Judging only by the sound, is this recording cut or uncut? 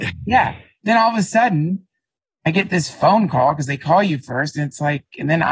uncut